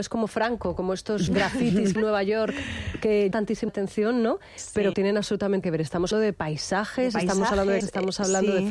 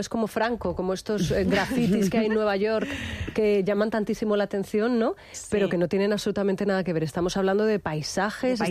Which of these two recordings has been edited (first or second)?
first